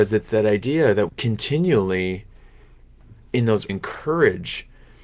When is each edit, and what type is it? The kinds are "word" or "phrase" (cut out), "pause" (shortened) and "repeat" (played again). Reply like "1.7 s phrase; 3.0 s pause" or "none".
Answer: 1.1 s word; 3.7 s phrase

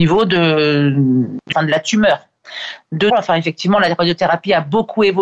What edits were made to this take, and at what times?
1.5 s word; 3.1 s phrase

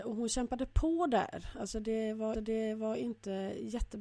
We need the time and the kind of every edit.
2.3 s repeat

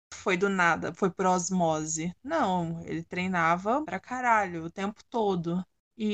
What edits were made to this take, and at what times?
3.8 s word

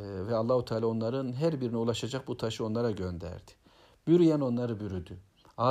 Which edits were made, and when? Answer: none

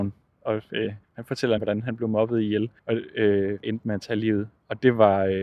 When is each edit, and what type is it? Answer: 1.0 s pause; 1.6 s phrase; 2.8 s pause; 3.6 s word

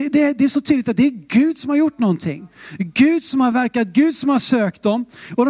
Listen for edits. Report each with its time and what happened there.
none

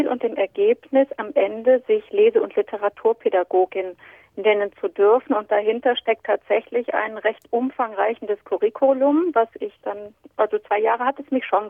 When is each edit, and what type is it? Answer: none

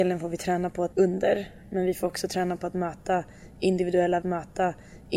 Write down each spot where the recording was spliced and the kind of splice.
0.9 s word; 2.0 s word; 4.2 s repeat

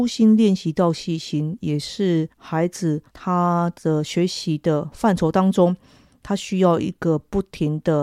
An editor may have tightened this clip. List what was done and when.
2.3 s pause; 3.1 s pause

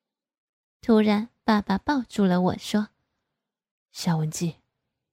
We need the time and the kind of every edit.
none

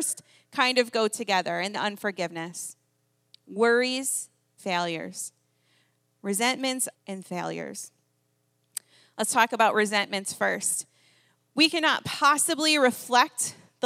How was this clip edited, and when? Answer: 1.7 s phrase; 4.6 s word; 6.9 s phrase

